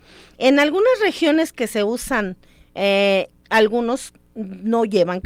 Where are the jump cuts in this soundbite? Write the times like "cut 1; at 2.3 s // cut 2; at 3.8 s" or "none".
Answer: none